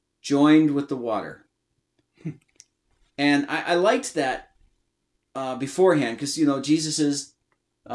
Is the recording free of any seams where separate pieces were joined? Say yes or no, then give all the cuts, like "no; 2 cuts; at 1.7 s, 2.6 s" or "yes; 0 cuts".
yes; 0 cuts